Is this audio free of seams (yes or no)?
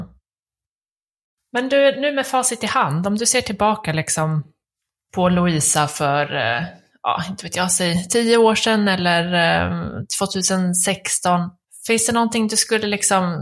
yes